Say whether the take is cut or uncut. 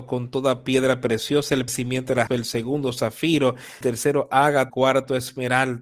cut